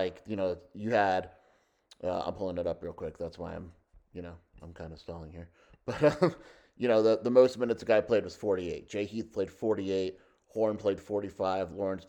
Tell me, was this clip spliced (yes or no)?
yes